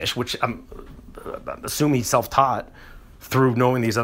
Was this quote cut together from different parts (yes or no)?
no